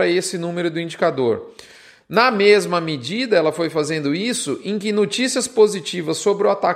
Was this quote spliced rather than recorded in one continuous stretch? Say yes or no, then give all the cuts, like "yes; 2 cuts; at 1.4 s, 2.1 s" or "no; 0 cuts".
no; 0 cuts